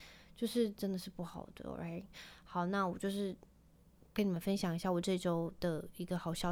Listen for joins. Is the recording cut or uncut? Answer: uncut